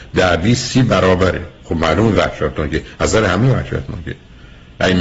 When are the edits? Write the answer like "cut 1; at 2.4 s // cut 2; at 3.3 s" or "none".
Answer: none